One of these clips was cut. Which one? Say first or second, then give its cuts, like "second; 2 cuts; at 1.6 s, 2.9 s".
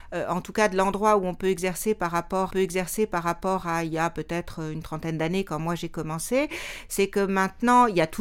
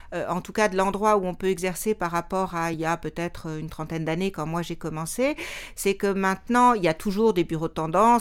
first; 1 cut; at 2.5 s